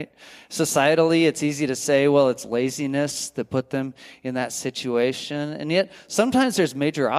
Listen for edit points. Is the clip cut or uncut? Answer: uncut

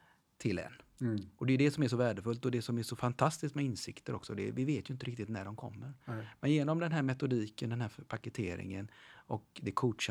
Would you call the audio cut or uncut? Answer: uncut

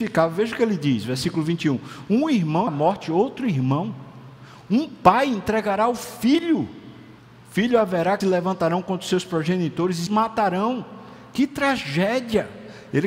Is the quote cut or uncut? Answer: cut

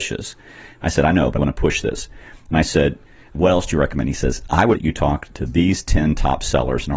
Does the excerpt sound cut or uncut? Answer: cut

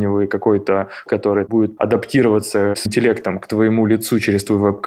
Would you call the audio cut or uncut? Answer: cut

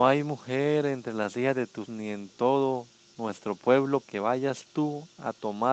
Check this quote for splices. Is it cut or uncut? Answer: cut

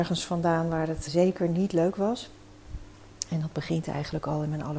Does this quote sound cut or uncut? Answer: cut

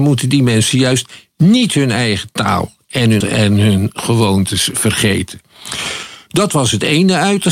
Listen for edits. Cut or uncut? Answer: cut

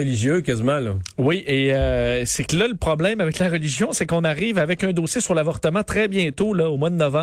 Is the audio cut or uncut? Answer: uncut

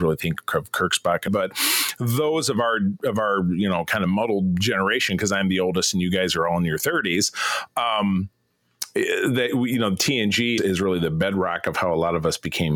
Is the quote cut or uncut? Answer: cut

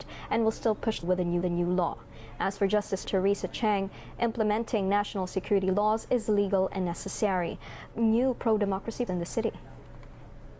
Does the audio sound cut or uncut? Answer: cut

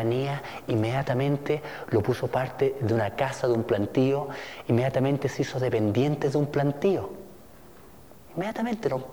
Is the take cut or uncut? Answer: uncut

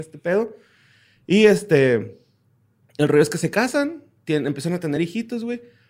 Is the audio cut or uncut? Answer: uncut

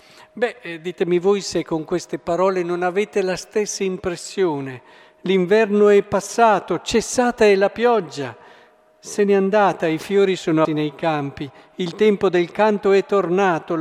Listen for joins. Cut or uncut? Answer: cut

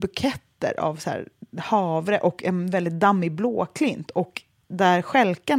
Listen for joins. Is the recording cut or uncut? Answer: uncut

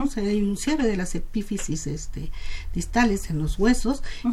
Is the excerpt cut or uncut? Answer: uncut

